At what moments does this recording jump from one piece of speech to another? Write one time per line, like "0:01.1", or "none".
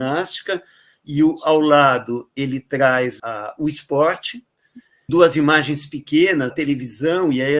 0:03.2
0:05.1
0:06.5